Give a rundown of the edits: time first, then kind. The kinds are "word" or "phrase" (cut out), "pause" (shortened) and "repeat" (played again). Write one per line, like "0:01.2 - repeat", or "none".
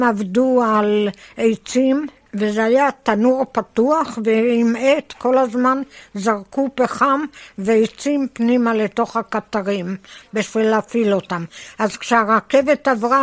none

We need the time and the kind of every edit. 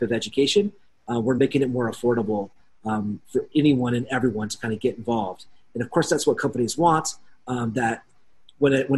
none

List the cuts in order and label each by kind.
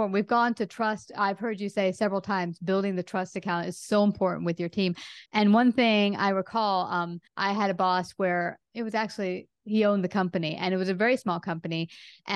0:05.3 - pause
0:07.3 - pause

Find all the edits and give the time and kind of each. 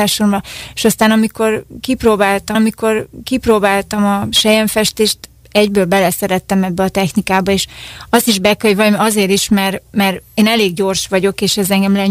0:02.5 - repeat

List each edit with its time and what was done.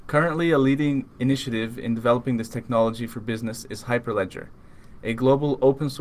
none

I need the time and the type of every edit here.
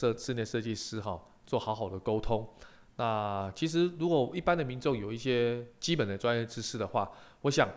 none

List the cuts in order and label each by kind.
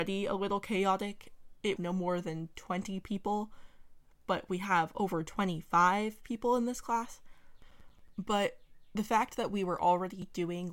0:01.8 - phrase

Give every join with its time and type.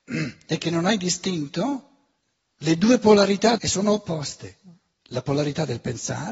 0:02.2 - pause
0:03.6 - word

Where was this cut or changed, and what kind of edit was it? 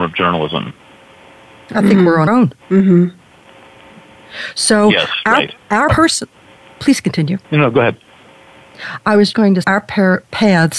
0:02.3 - word
0:02.6 - pause
0:05.9 - word
0:06.6 - pause
0:07.4 - pause
0:09.3 - word
0:09.6 - word

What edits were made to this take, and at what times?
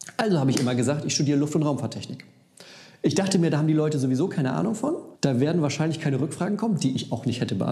0:05.2 - pause

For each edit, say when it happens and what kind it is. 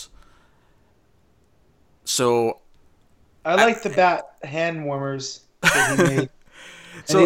none

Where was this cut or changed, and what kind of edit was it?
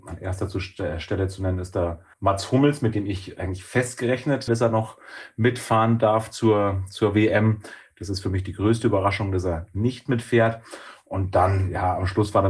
0:02.1 - pause
0:04.5 - word

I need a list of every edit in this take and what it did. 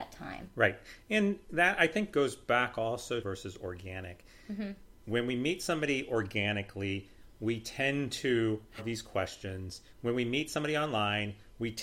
0:02.1 - word
0:03.2 - phrase
0:08.8 - phrase
0:09.9 - pause

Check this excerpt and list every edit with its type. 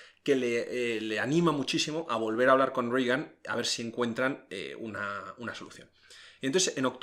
none

